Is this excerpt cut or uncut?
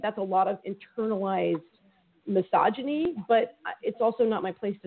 uncut